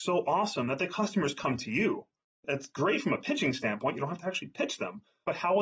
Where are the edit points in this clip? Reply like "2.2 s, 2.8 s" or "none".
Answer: none